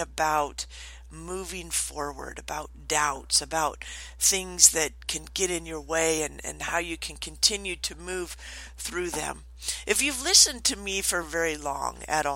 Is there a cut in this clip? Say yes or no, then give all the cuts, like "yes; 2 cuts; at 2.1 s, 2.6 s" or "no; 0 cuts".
no; 0 cuts